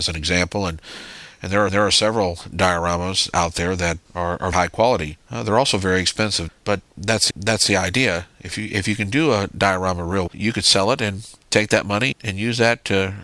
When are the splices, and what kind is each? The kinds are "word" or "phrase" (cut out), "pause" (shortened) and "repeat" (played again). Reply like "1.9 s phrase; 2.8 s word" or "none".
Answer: 1.7 s repeat; 4.1 s word; 4.5 s word; 5.2 s pause; 7.3 s repeat; 10.3 s word; 12.1 s word